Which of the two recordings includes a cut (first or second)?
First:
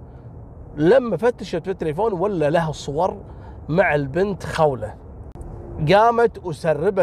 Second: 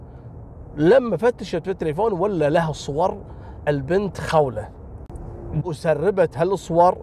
second